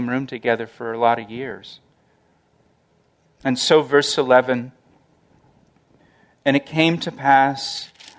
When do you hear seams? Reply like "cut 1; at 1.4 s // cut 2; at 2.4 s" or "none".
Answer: none